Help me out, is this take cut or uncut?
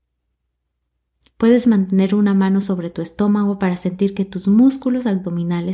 uncut